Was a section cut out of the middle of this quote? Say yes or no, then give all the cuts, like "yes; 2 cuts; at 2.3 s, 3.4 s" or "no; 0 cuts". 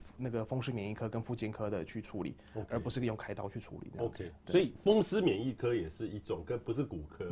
yes; 1 cut; at 4.4 s